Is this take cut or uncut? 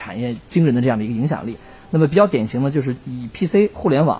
uncut